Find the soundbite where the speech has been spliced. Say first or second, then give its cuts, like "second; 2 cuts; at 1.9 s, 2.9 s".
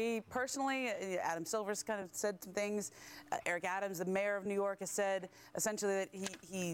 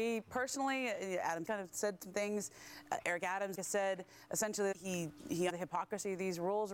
second; 4 cuts; at 1.4 s, 3.5 s, 4.7 s, 5.5 s